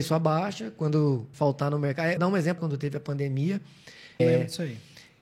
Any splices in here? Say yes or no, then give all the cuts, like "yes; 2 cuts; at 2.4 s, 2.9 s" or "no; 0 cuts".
yes; 4 cuts; at 1.3 s, 2.2 s, 2.6 s, 4.2 s